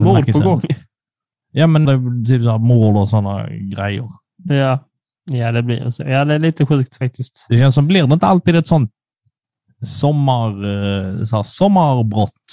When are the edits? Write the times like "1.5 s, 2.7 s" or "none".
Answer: 1.9 s